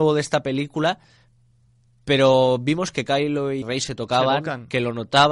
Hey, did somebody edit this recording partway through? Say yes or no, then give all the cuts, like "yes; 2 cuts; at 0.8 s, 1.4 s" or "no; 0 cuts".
yes; 1 cut; at 3.6 s